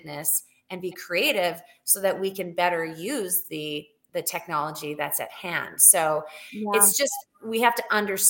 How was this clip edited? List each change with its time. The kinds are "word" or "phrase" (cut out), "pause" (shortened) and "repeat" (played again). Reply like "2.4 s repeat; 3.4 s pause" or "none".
none